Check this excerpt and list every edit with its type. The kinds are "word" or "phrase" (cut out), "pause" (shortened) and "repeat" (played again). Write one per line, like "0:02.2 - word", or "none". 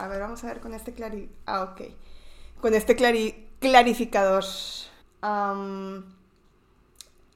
0:05.0 - pause